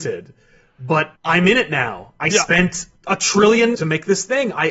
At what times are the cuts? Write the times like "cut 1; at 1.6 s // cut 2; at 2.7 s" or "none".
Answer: cut 1; at 1.2 s // cut 2; at 3.0 s // cut 3; at 3.7 s